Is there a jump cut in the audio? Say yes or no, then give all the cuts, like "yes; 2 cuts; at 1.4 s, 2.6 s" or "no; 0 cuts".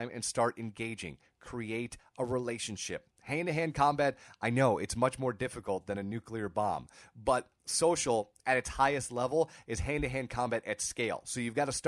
no; 0 cuts